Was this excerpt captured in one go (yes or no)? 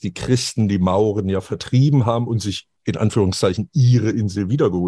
yes